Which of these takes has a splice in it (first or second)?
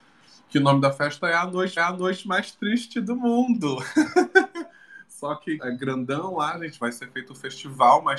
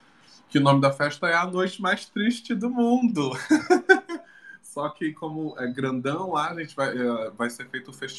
first